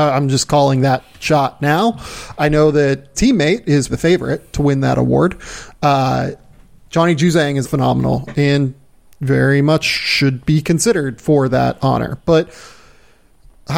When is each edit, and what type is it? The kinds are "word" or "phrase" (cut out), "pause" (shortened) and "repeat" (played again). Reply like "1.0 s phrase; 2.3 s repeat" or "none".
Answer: 3.1 s word; 3.9 s word; 7.6 s word